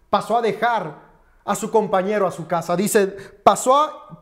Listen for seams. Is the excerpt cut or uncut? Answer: uncut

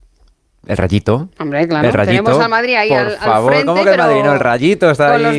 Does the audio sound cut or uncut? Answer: uncut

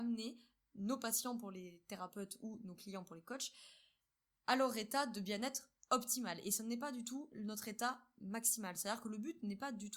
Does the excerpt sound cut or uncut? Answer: uncut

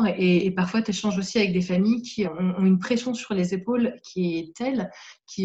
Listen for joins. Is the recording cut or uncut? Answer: cut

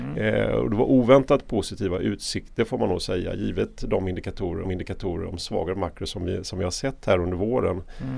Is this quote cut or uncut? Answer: cut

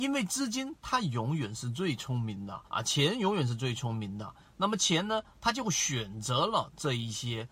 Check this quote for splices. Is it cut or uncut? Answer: cut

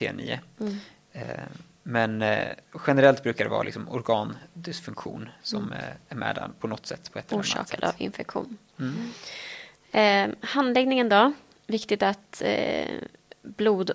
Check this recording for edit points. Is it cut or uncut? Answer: uncut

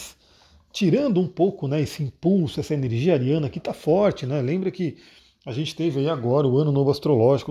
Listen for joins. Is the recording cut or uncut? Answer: uncut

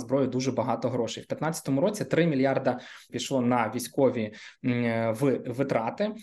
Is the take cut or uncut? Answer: cut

